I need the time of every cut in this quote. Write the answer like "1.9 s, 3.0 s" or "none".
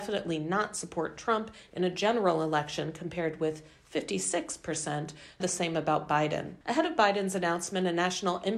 5.4 s, 6.6 s